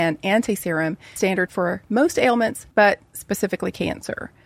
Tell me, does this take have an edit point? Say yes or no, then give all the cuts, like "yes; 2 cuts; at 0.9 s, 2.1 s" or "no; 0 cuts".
yes; 3 cuts; at 1.2 s, 1.5 s, 2.7 s